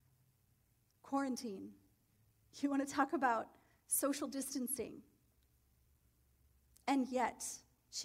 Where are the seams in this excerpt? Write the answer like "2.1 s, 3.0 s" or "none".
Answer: none